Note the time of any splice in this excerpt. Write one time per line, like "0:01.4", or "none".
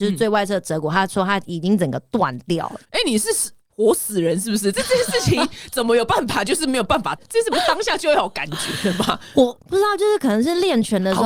0:02.8